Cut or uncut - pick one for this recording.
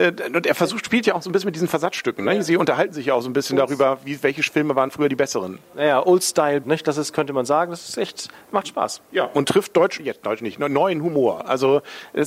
cut